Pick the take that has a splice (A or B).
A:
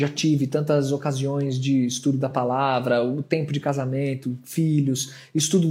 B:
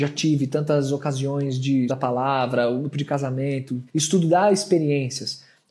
B